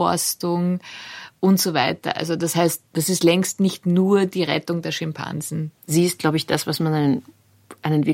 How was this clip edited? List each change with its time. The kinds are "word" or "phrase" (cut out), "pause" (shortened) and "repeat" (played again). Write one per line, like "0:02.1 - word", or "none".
0:02.9 - pause
0:05.8 - pause